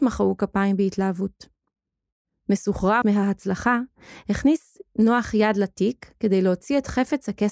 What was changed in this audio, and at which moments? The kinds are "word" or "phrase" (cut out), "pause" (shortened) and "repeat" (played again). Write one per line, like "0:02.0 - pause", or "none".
0:03.0 - word